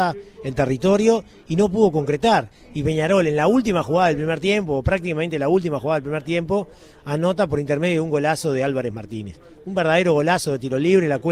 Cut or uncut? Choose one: uncut